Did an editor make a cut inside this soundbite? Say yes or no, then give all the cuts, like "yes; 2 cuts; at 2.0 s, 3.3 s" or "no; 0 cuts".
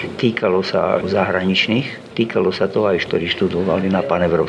yes; 2 cuts; at 1.0 s, 3.1 s